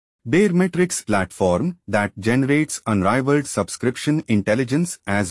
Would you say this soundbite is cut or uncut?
cut